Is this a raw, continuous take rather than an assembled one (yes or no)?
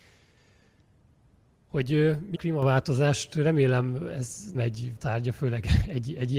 no